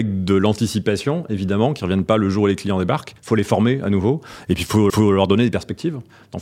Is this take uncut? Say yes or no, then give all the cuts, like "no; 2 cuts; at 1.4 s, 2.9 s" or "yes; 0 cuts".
no; 2 cuts; at 3.2 s, 4.9 s